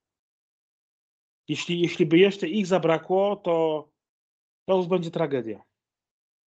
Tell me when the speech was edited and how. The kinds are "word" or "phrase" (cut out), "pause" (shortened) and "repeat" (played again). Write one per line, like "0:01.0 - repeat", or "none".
0:04.1 - pause